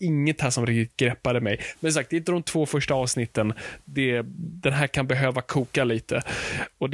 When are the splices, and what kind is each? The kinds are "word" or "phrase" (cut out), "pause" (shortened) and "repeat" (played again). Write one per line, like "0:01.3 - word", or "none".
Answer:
none